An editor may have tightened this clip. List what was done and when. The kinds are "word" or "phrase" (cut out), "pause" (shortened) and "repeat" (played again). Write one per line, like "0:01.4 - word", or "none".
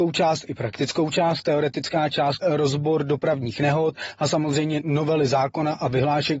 0:02.4 - word